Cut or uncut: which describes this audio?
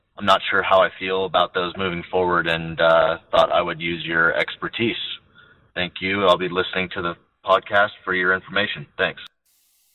uncut